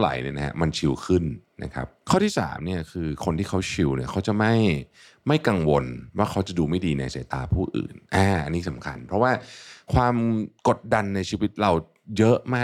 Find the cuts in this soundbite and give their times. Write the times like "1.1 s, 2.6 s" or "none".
none